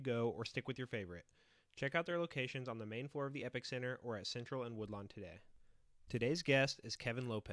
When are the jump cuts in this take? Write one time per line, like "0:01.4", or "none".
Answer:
none